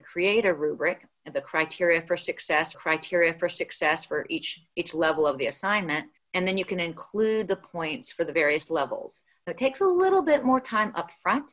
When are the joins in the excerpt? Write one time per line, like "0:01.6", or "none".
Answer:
0:02.7
0:06.2